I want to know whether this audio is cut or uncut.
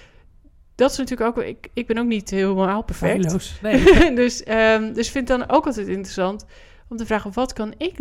uncut